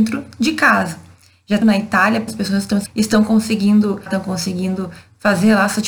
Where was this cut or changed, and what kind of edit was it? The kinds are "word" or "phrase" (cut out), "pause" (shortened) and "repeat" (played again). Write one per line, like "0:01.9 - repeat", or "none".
0:01.6 - word
0:02.3 - word
0:02.9 - word
0:04.1 - word